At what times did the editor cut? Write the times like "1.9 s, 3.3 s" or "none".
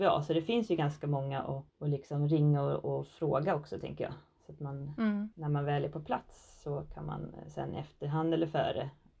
1.7 s, 5.3 s

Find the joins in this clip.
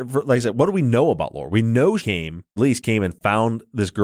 2.0 s, 2.6 s

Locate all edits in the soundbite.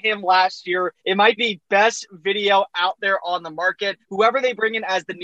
1.0 s, 1.4 s, 4.0 s

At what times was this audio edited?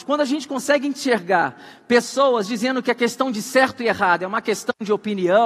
none

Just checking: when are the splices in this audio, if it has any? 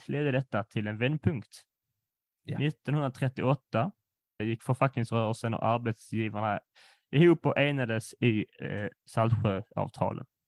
4.4 s

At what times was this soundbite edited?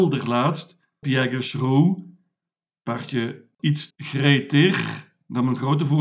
1.0 s, 3.6 s, 3.9 s

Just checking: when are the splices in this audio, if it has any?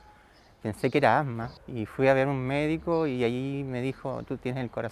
1.6 s

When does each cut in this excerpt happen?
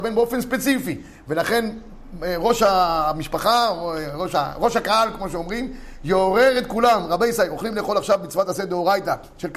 none

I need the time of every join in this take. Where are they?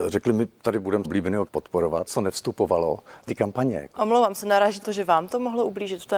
1.0 s, 1.5 s, 2.1 s, 3.3 s, 4.8 s

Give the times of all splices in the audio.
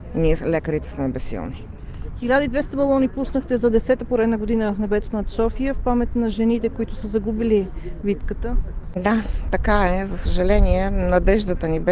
none

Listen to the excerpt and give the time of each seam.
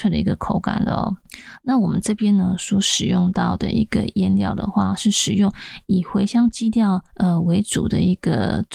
7.1 s

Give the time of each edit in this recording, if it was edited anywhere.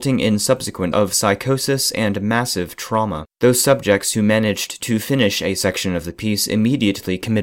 0.9 s, 3.3 s

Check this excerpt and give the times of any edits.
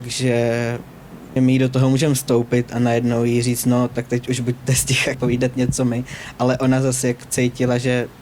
1.4 s, 5.1 s

